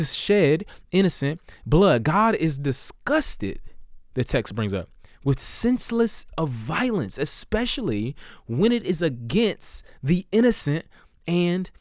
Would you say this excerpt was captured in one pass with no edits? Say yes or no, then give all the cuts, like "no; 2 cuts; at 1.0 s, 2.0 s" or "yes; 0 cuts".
no; 1 cut; at 6.3 s